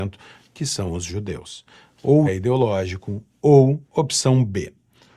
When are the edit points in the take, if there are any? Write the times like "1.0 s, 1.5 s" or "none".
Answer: 2.3 s, 3.8 s